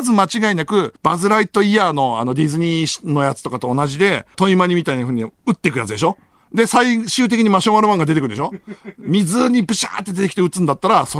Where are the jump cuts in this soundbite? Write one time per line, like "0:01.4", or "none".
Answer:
0:01.0
0:04.3